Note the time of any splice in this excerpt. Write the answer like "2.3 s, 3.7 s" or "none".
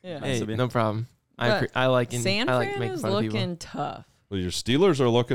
none